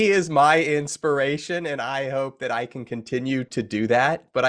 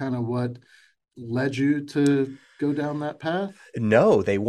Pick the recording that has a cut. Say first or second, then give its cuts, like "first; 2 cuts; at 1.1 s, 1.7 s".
second; 1 cut; at 1.0 s